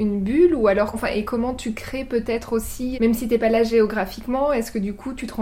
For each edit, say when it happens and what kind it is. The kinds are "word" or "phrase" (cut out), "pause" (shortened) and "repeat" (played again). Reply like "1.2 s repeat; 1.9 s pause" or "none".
0.9 s word; 2.9 s word